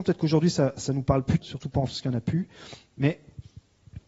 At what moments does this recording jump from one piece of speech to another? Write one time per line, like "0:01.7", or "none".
0:01.4
0:01.9